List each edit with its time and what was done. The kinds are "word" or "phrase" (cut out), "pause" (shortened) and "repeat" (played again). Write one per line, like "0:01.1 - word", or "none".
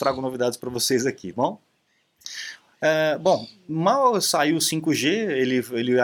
0:01.3 - word